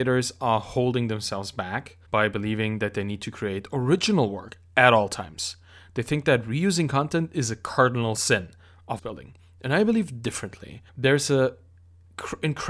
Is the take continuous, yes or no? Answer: no